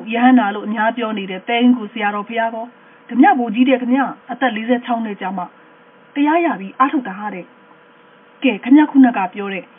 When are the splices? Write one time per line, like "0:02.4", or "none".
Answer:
0:04.2